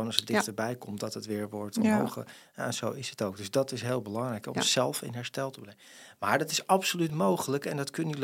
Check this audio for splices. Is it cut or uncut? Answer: uncut